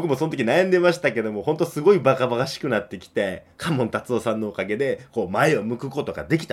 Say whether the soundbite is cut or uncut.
uncut